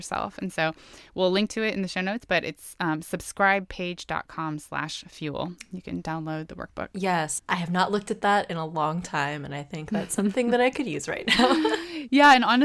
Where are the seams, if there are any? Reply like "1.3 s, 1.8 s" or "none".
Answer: none